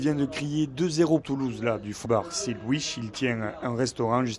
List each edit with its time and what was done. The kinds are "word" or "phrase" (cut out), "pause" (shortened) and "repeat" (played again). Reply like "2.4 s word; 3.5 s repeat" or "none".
1.2 s word; 2.1 s word